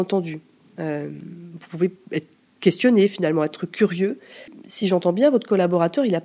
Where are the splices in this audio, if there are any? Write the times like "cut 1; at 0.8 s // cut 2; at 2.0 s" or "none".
none

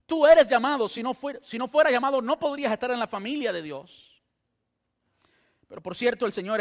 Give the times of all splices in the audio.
none

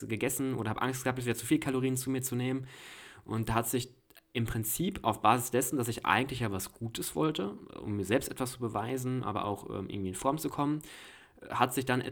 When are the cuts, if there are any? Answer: cut 1; at 9.2 s

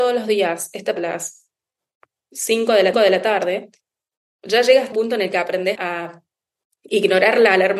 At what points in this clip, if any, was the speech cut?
cut 1; at 1.0 s // cut 2; at 2.9 s // cut 3; at 4.9 s // cut 4; at 5.8 s

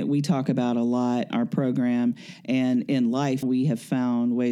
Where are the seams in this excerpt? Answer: cut 1; at 1.3 s // cut 2; at 3.4 s

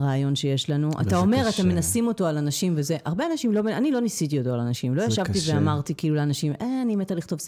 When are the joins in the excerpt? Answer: none

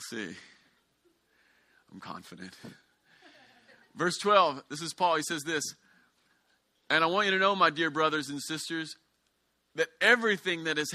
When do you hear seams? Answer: none

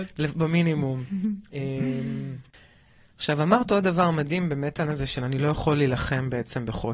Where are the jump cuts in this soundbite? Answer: cut 1; at 4.8 s

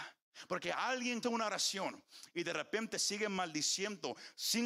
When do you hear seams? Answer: cut 1; at 1.2 s

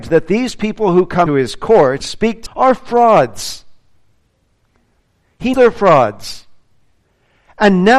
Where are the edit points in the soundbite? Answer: cut 1; at 1.3 s // cut 2; at 2.0 s // cut 3; at 2.5 s // cut 4; at 5.5 s

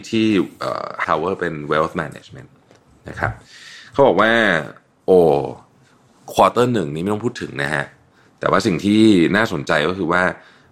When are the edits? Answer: cut 1; at 1.0 s

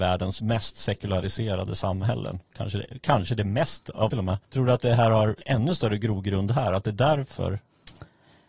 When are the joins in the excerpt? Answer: cut 1; at 4.1 s // cut 2; at 4.4 s // cut 3; at 5.4 s

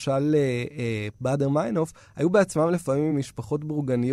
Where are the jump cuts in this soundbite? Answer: none

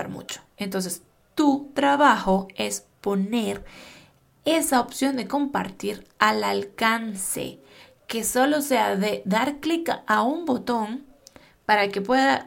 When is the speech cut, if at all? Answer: none

